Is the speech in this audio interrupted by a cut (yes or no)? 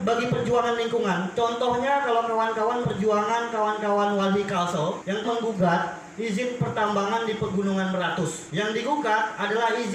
yes